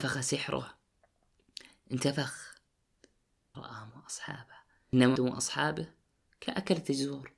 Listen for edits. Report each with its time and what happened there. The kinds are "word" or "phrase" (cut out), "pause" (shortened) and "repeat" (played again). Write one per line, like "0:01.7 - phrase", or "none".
0:03.5 - word
0:03.9 - word
0:05.2 - word